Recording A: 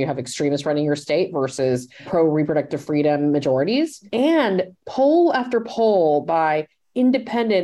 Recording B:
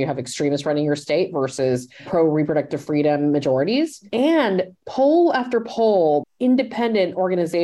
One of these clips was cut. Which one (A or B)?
B